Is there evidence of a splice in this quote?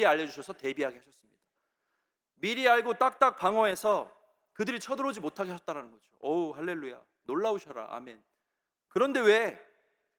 no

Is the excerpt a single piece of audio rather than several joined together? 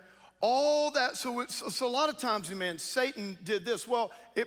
yes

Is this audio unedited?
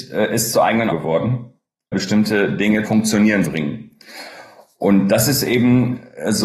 no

